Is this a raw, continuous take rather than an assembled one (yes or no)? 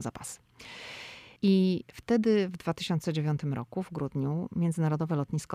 no